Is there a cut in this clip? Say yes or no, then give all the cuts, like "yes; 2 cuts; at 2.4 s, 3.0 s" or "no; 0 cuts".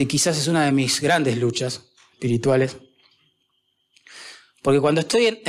no; 0 cuts